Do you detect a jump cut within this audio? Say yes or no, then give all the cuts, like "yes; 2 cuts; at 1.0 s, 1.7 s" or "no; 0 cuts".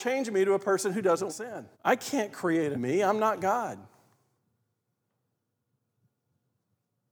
yes; 3 cuts; at 1.3 s, 1.7 s, 2.7 s